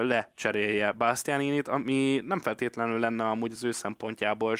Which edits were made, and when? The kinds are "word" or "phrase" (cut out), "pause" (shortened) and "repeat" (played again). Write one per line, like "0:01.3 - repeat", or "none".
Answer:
none

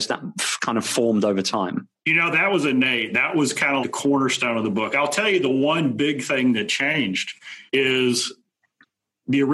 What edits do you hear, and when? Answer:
0:02.0 - pause
0:03.8 - word
0:07.7 - pause

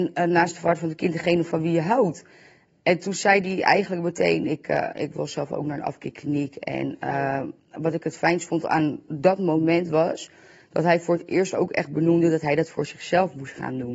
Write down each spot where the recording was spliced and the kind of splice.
none

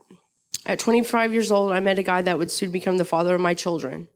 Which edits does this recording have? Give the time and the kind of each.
none

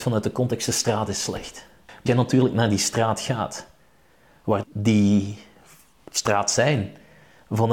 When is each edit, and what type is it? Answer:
0:02.1 - word
0:04.6 - phrase

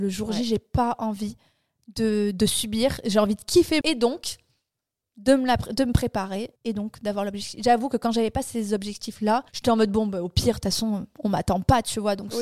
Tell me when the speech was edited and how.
0:03.8 - phrase
0:06.6 - pause
0:09.5 - pause

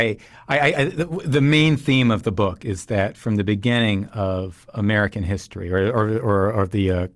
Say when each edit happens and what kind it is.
none

